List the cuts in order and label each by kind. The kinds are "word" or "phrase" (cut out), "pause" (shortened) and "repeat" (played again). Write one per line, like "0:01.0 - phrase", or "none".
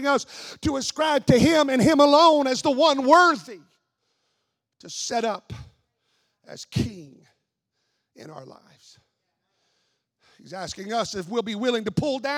none